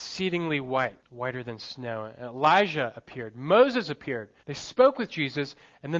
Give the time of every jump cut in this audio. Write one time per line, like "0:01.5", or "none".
0:01.0
0:04.4

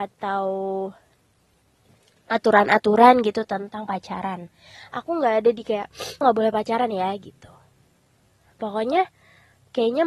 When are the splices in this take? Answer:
0:06.2

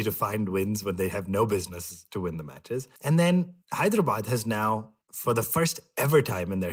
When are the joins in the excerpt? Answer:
0:03.0
0:03.6
0:05.0

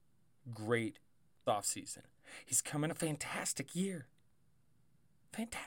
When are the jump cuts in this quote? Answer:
0:01.5
0:02.9

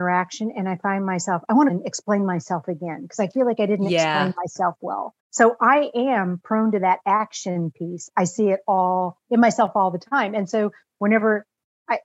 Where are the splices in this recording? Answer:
0:01.7
0:05.2

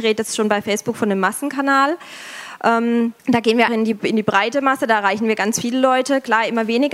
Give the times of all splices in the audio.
0:03.2
0:03.7

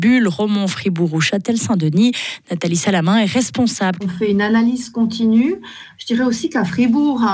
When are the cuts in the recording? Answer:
0:04.0

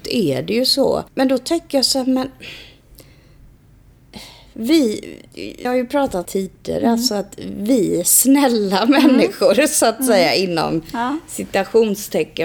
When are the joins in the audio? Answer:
0:01.1
0:05.6
0:06.2

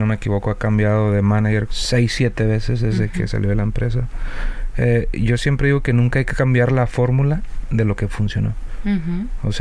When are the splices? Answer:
0:01.7

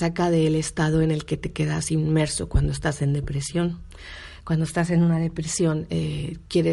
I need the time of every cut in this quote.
none

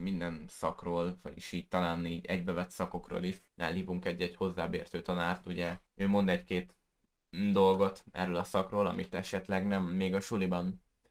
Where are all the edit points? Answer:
0:03.5
0:05.9

